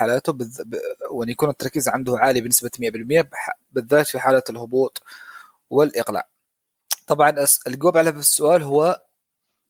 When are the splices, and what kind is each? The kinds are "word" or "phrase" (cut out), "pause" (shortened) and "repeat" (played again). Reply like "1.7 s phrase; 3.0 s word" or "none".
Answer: none